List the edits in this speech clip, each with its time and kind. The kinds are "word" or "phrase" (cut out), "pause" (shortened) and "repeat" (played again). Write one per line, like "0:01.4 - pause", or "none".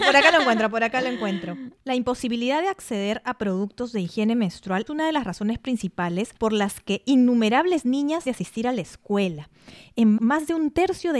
0:01.8 - pause
0:04.9 - word
0:06.4 - pause
0:08.3 - word
0:10.2 - word